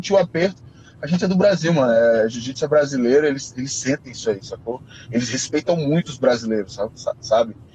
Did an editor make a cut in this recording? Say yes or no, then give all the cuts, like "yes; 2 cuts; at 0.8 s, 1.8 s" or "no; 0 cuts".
no; 0 cuts